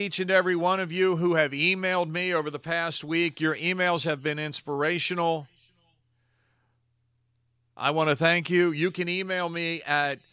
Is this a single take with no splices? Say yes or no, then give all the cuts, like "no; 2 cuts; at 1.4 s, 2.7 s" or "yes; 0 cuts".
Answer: yes; 0 cuts